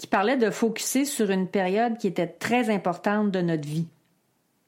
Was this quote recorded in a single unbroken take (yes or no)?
yes